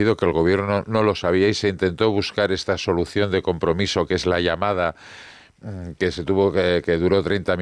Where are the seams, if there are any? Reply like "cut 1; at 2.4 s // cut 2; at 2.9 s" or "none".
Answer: none